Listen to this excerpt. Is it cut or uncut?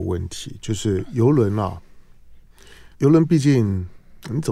cut